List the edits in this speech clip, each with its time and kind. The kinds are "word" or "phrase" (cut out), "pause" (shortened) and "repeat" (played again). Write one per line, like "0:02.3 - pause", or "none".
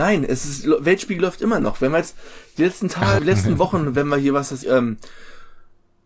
0:03.2 - word
0:04.6 - word